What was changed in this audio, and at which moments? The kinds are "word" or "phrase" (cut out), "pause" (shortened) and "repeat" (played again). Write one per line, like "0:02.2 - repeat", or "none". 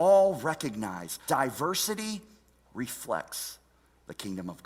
0:01.3 - word